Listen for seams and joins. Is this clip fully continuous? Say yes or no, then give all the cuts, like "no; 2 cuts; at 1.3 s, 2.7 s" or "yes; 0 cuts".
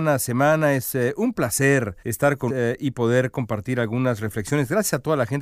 no; 2 cuts; at 2.0 s, 2.5 s